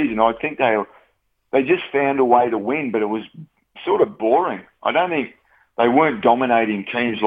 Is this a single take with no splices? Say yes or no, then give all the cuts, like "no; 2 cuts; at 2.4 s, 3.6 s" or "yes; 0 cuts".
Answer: yes; 0 cuts